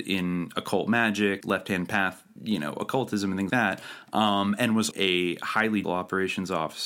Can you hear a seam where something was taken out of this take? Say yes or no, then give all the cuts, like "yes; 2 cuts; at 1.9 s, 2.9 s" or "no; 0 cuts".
yes; 5 cuts; at 1.4 s, 2.4 s, 3.5 s, 4.9 s, 5.8 s